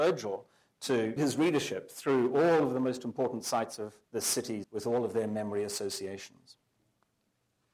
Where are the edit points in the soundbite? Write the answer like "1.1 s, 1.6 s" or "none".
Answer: 1.2 s, 4.0 s, 4.6 s